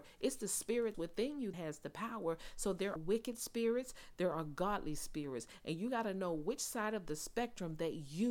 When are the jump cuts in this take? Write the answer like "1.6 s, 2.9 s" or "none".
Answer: 0.9 s, 1.5 s, 3.0 s